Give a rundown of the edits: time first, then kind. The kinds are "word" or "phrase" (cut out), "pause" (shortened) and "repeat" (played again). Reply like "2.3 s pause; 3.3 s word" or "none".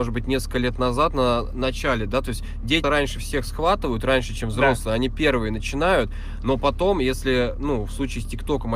2.8 s word